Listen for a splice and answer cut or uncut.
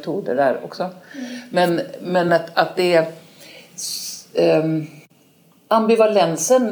uncut